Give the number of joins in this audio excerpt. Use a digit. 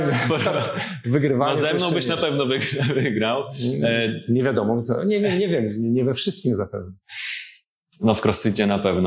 0